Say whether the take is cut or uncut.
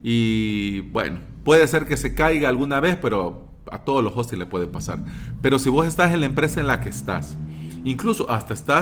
uncut